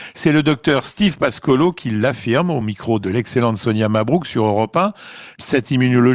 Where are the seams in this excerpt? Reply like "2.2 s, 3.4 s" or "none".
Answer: none